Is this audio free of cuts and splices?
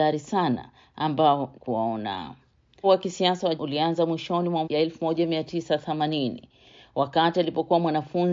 no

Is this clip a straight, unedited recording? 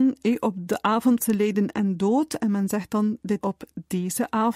no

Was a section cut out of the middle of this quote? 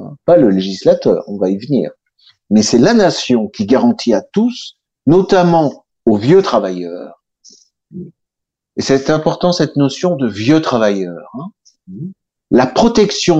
no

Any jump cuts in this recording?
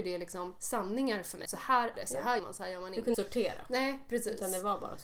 yes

